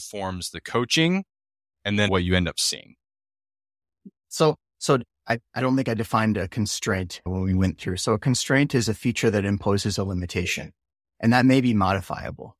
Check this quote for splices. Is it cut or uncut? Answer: cut